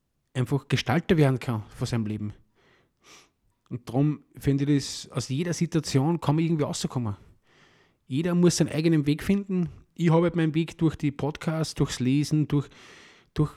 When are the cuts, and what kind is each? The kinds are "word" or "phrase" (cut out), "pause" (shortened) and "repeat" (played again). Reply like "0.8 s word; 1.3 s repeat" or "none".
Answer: none